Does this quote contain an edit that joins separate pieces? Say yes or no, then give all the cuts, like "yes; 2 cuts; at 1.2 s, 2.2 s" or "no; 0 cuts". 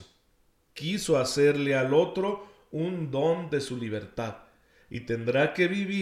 no; 0 cuts